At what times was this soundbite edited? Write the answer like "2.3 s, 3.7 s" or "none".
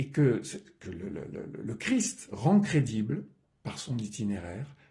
none